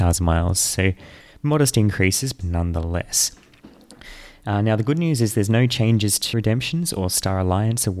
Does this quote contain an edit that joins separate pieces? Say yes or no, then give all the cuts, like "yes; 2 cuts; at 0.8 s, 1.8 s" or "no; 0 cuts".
yes; 3 cuts; at 1.2 s, 2.4 s, 6.3 s